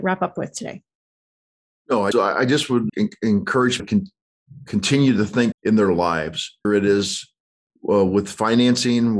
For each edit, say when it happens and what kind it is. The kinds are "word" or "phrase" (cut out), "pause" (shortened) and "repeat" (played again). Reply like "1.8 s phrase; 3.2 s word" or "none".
2.1 s word; 2.9 s word; 3.8 s word; 5.5 s word; 6.6 s word